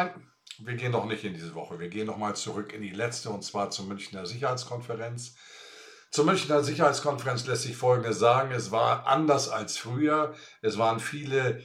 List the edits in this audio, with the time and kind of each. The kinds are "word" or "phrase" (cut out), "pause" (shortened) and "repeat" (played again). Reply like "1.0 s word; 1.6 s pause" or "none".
none